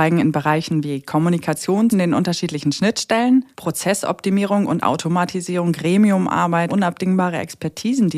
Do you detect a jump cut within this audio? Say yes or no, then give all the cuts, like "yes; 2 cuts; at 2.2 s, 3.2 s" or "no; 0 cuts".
yes; 3 cuts; at 1.9 s, 3.5 s, 6.7 s